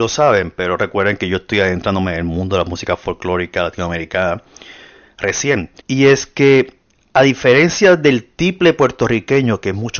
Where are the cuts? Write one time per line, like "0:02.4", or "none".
0:05.8
0:06.9